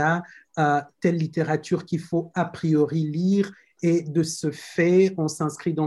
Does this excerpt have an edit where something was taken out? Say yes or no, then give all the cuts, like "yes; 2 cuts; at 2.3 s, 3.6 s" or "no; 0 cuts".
no; 0 cuts